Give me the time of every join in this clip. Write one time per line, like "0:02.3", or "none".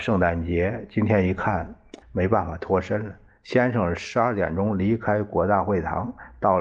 0:02.0

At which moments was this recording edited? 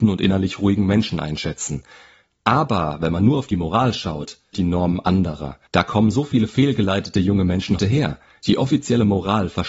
0:04.5
0:05.7
0:07.8

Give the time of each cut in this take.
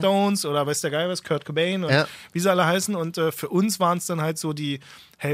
none

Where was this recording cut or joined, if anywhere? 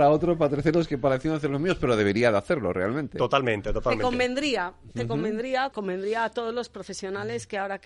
0:05.7

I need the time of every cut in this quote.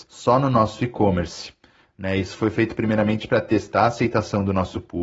none

